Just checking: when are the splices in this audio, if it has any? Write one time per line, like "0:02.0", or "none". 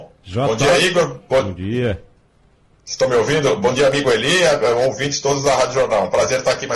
none